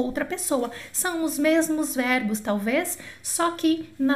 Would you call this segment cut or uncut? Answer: uncut